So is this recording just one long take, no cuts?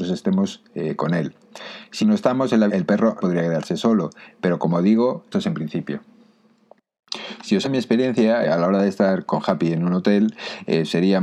no; 7 cuts; at 2.0 s, 2.7 s, 3.2 s, 5.3 s, 7.6 s, 8.4 s, 9.3 s

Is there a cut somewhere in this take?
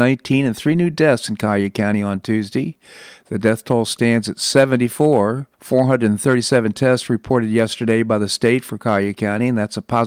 yes; 1 cut; at 5.5 s

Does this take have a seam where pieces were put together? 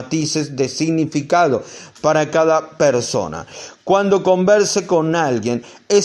no; 0 cuts

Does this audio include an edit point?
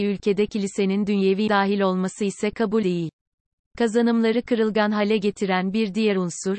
yes; 2 cuts; at 1.5 s, 2.8 s

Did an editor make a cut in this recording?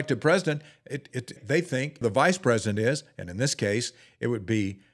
yes; 2 cuts; at 1.4 s, 2.0 s

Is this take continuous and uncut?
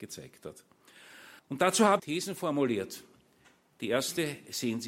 no; 2 cuts; at 1.4 s, 2.0 s

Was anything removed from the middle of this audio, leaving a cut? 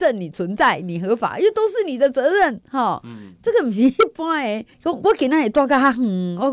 yes; 1 cut; at 4.7 s

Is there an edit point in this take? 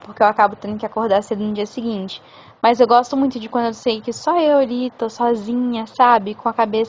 no; 0 cuts

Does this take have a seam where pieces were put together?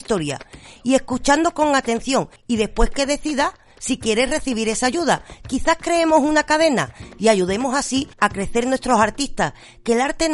yes; 1 cut; at 8.1 s

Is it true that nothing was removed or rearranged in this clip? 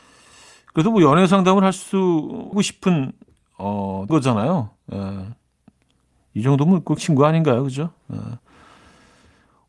no; 3 cuts; at 2.5 s, 4.1 s, 7.0 s

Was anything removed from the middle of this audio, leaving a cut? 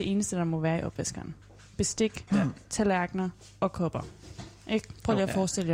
no; 0 cuts

